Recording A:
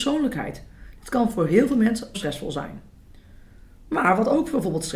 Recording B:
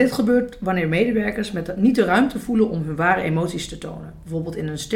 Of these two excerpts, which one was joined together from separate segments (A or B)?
A